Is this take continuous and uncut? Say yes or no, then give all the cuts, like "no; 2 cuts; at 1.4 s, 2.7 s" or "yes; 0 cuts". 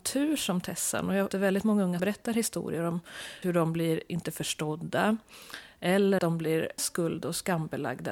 no; 5 cuts; at 1.3 s, 2.0 s, 3.4 s, 6.2 s, 6.8 s